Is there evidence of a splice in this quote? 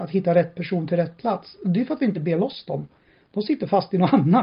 no; 0 cuts

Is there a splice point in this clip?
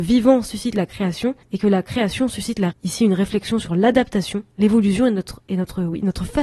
yes; 2 cuts; at 1.4 s, 2.7 s

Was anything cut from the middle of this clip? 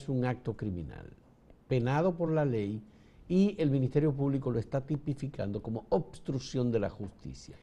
no; 0 cuts

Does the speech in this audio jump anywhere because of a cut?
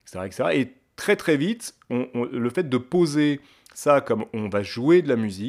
no; 0 cuts

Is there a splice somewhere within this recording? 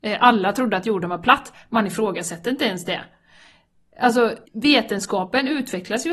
yes; 1 cut; at 4.5 s

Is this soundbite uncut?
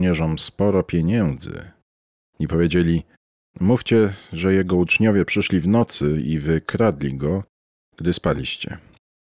yes; 0 cuts

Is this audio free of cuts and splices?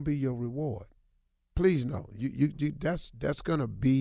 yes; 0 cuts

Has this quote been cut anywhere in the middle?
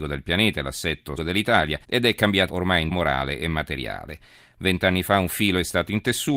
yes; 4 cuts; at 1.2 s, 1.8 s, 2.5 s, 2.9 s

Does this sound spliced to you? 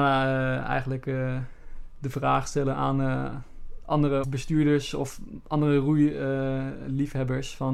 yes; 1 cut; at 4.2 s

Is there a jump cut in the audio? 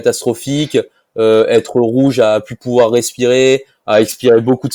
no; 0 cuts

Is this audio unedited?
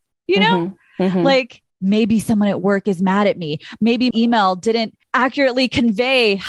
no; 2 cuts; at 1.7 s, 4.1 s

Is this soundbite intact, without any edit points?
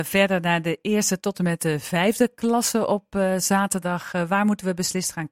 yes; 0 cuts

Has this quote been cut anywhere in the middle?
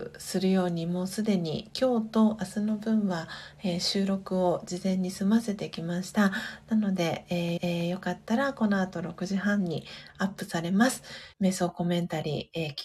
yes; 2 cuts; at 7.6 s, 11.3 s

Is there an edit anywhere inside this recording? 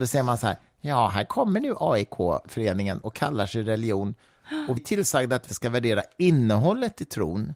yes; 2 cuts; at 4.8 s, 5.5 s

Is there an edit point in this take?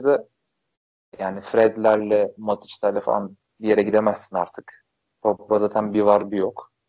no; 0 cuts

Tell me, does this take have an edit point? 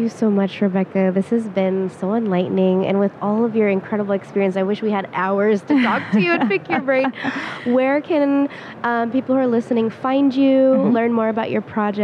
no; 0 cuts

